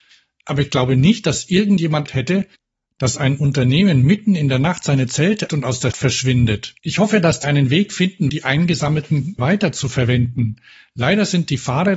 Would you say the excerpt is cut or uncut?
cut